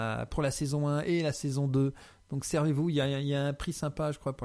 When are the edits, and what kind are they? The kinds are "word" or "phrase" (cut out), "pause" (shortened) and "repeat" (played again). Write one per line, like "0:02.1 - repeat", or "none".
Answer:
none

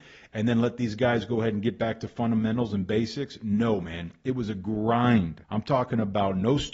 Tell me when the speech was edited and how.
0:05.4 - pause

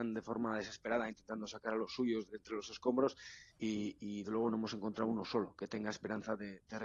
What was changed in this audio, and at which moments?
0:02.3 - word
0:03.5 - pause
0:04.2 - word

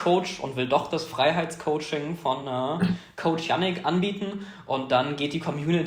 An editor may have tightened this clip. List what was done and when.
none

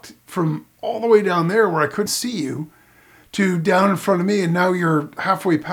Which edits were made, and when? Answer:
0:02.1 - word

